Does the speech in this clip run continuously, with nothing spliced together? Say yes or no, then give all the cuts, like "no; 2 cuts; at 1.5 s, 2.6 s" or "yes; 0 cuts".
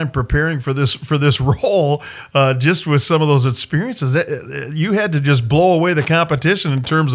yes; 0 cuts